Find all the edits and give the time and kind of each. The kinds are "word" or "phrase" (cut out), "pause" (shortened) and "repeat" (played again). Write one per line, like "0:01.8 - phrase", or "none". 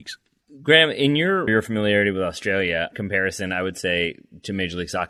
0:01.5 - phrase
0:02.9 - word